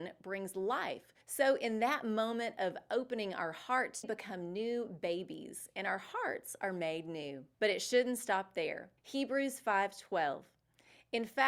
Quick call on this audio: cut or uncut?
cut